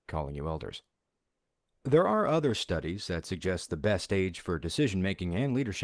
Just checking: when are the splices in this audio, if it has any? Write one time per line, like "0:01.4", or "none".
none